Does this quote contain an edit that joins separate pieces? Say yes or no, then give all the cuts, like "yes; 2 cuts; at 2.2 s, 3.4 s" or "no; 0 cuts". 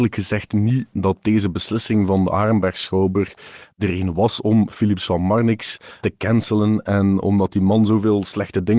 yes; 1 cut; at 6.0 s